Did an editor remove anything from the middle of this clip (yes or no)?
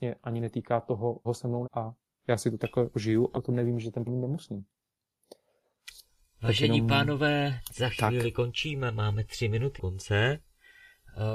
yes